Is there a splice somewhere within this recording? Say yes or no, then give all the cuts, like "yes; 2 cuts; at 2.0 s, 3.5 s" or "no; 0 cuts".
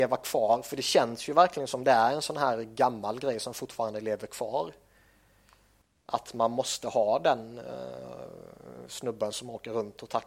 no; 0 cuts